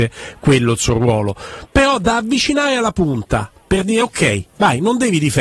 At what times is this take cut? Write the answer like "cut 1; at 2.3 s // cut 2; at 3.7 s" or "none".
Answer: none